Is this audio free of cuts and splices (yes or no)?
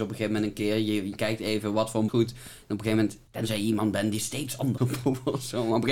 no